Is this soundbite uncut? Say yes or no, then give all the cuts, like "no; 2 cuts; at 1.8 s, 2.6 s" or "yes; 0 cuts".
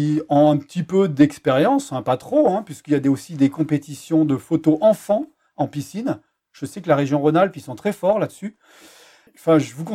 yes; 0 cuts